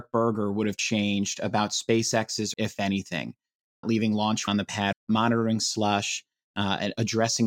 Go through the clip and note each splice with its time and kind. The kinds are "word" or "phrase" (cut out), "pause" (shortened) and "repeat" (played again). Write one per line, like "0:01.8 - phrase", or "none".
0:02.5 - phrase
0:03.8 - phrase
0:04.5 - word
0:04.9 - word